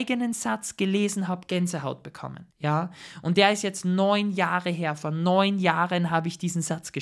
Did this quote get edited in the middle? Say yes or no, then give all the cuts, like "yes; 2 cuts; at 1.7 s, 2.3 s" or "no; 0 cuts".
yes; 1 cut; at 2.5 s